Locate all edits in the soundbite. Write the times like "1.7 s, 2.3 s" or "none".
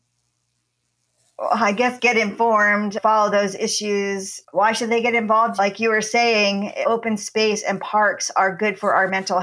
none